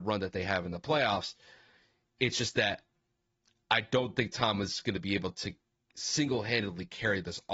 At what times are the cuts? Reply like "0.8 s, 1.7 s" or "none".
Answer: none

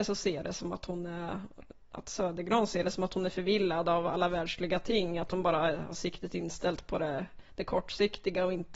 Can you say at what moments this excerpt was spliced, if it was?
none

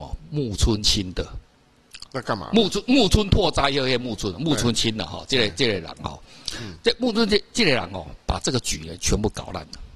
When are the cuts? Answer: 2.1 s

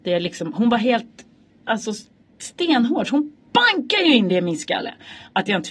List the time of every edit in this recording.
3.4 s

